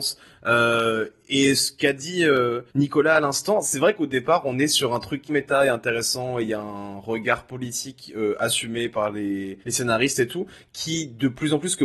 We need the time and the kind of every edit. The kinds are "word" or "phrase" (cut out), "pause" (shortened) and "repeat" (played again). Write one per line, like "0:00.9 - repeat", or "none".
0:02.7 - pause
0:05.3 - word
0:09.6 - pause

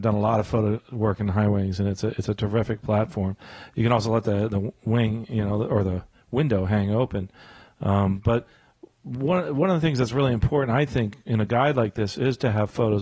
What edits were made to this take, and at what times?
none

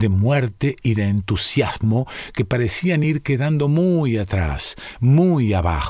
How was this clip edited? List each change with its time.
none

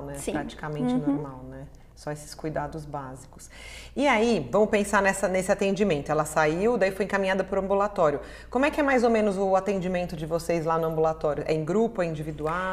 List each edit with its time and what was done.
none

